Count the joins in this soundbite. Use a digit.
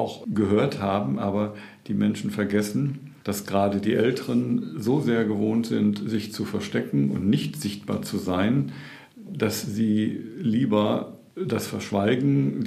0